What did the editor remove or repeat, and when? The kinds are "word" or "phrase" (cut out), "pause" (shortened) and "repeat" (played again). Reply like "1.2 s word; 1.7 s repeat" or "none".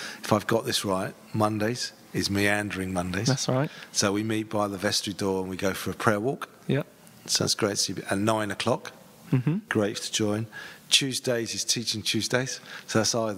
9.7 s phrase